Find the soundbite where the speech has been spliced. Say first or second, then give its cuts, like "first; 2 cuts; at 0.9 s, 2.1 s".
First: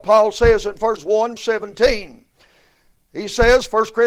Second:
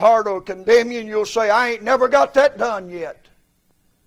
first; 2 cuts; at 1.0 s, 1.4 s